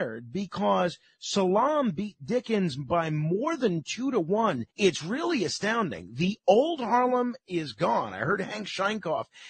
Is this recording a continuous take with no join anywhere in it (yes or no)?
no